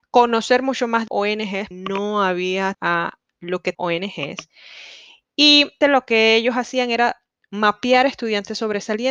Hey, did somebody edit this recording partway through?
yes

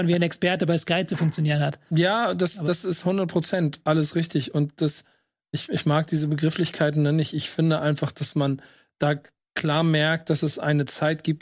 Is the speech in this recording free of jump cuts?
yes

